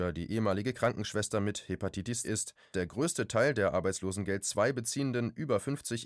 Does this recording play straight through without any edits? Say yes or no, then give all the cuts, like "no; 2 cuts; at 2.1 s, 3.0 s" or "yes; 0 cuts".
no; 2 cuts; at 2.2 s, 2.7 s